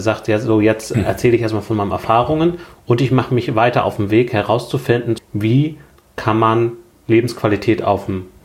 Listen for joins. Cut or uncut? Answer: uncut